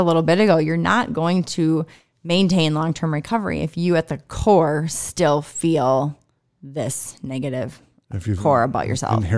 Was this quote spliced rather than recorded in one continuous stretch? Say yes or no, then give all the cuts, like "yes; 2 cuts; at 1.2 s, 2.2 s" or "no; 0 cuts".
no; 0 cuts